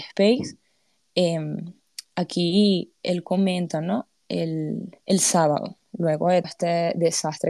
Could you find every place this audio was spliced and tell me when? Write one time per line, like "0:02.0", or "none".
0:05.0
0:06.4